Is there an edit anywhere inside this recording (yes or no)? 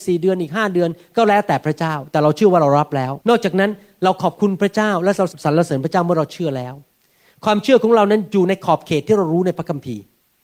yes